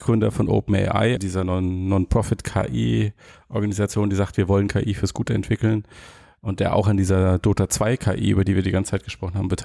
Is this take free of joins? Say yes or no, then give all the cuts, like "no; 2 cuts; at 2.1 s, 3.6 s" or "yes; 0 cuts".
no; 1 cut; at 1.2 s